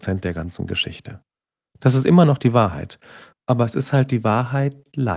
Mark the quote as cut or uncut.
uncut